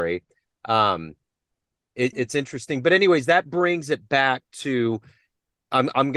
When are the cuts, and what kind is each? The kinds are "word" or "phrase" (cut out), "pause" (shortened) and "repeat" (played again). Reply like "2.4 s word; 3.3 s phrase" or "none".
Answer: 2.1 s word